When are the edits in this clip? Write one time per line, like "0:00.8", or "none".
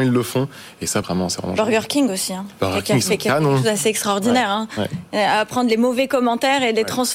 0:01.0